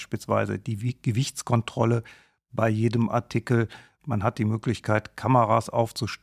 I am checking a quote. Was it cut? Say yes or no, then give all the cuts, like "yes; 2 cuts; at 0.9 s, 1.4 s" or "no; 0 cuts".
no; 0 cuts